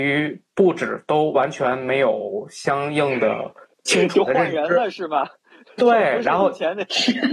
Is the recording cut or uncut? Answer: uncut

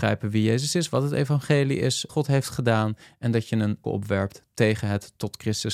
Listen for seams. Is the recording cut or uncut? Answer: cut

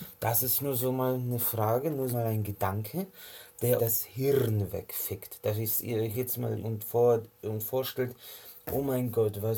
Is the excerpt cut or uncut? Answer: cut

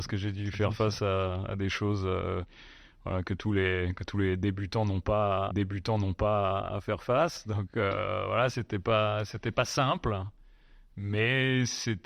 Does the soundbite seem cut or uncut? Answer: cut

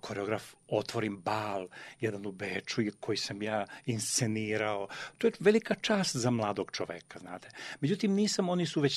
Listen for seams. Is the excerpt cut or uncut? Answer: cut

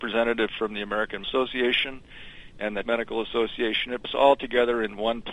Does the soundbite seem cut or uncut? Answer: cut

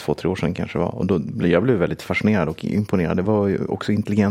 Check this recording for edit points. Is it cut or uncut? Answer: uncut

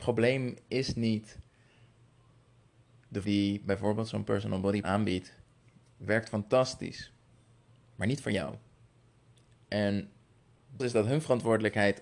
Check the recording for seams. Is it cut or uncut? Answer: cut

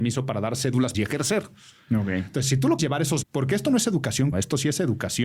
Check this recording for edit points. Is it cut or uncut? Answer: cut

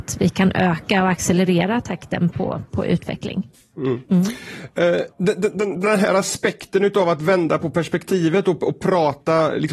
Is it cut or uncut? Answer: cut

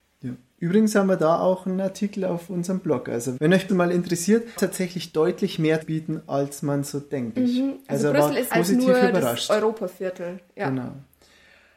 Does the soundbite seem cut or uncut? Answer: cut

